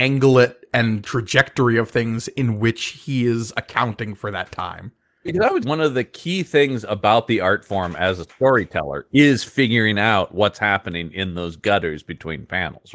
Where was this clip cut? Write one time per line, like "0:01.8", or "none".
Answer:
0:01.0
0:05.6

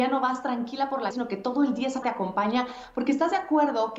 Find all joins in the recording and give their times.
0:01.1
0:02.0

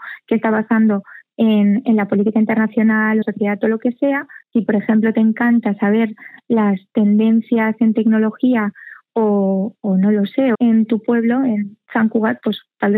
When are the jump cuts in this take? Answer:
0:03.2
0:04.4
0:10.5

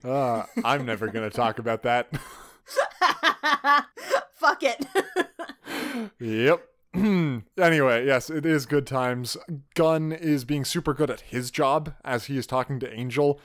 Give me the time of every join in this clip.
none

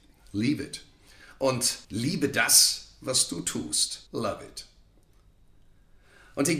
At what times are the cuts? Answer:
0:01.8
0:04.1

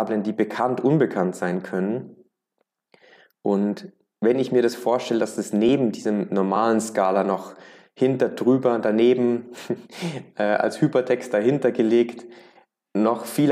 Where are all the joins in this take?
none

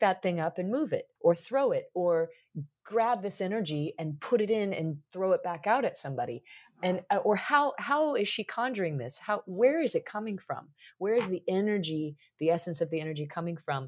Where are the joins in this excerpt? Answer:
0:01.2

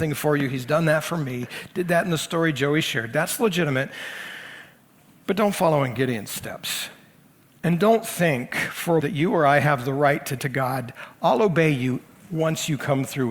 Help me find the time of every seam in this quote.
0:09.0
0:10.4

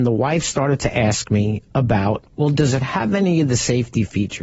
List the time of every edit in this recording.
0:02.3

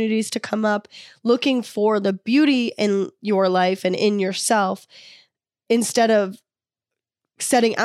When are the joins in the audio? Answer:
none

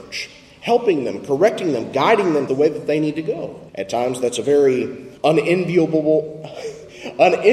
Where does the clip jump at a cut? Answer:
0:02.5
0:03.7
0:05.2

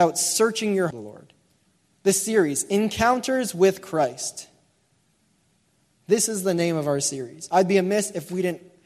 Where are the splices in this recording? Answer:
0:00.9

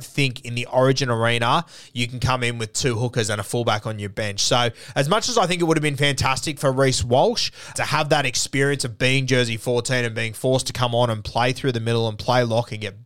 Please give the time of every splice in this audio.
0:07.7

